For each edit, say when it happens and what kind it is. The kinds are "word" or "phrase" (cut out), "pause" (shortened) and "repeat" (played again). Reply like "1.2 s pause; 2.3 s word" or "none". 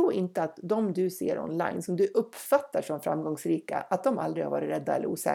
none

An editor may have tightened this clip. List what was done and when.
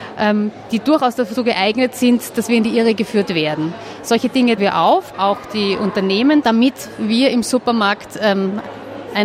4.6 s word; 5.1 s word; 6.4 s word

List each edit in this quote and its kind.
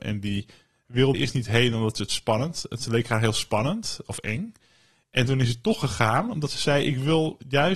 1.1 s word

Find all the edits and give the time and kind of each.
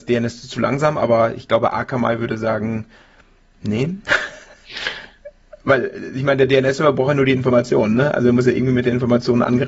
none

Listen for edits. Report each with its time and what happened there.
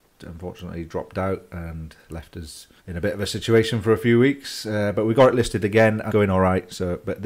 2.1 s word; 2.8 s pause; 6.1 s word

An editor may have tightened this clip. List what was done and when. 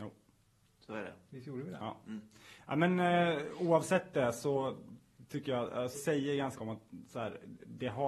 5.9 s word; 6.6 s word

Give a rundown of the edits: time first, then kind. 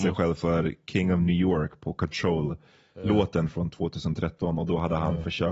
none

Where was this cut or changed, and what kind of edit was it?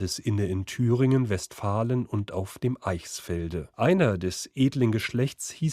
3.7 s pause

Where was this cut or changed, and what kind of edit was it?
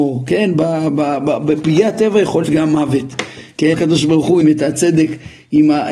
2.4 s word; 3.7 s word; 4.4 s word

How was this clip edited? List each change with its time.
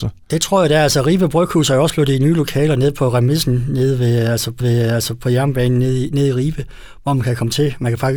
4.6 s repeat

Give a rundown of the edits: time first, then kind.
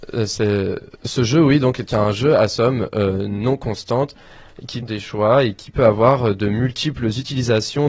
1.0 s pause; 4.8 s phrase

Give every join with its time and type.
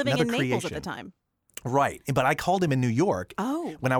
none

